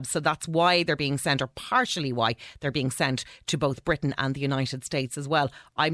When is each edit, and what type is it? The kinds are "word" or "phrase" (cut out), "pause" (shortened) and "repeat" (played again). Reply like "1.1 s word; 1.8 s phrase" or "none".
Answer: none